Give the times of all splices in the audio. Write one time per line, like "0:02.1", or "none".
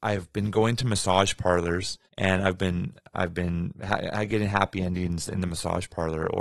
0:02.0